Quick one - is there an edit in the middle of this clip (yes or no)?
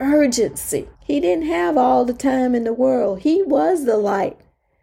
yes